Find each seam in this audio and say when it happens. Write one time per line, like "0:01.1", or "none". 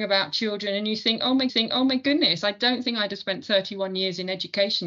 0:01.5